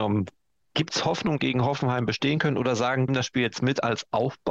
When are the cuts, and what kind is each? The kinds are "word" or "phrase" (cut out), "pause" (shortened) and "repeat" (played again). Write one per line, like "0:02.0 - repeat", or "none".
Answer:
0:01.4 - phrase
0:03.1 - phrase